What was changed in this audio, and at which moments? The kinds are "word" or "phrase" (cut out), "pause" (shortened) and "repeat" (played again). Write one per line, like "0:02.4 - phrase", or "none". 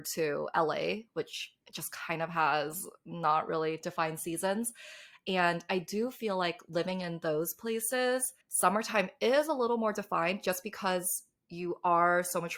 0:01.6 - pause
0:08.4 - pause